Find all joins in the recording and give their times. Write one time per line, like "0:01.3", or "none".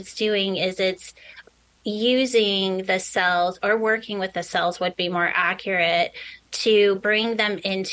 none